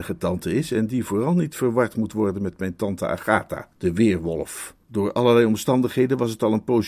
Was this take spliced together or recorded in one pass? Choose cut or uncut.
cut